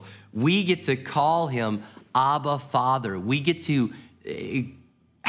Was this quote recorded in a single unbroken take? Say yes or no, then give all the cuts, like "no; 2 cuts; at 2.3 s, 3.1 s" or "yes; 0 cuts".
yes; 0 cuts